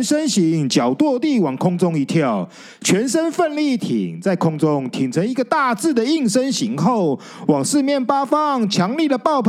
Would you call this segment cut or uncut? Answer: uncut